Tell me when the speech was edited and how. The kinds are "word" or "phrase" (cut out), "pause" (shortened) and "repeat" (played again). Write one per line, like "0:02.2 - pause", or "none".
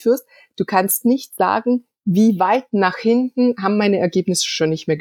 none